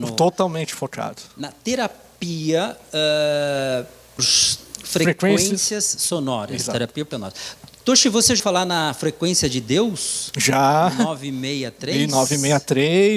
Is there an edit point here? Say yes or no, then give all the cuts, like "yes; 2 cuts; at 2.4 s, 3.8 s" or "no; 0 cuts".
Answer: yes; 3 cuts; at 4.2 s, 7.1 s, 8.4 s